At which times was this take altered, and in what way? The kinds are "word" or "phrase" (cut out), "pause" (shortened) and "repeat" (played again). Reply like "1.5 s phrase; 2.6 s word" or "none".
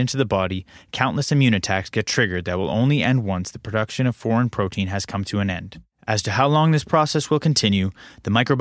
none